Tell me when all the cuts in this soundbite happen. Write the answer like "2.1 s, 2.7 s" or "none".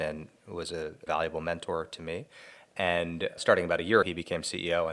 1.1 s, 3.4 s, 4.0 s